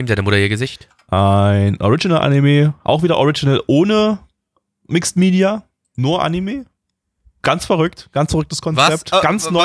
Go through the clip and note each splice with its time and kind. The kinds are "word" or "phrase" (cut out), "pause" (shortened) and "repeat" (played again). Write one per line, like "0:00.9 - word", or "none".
none